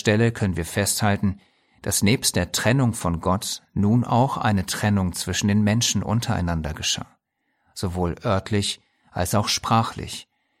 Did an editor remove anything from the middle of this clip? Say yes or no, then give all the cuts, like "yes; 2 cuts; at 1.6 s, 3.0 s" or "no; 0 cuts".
no; 0 cuts